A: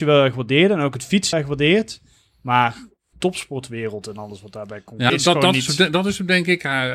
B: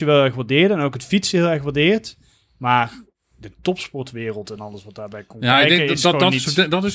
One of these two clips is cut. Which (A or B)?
A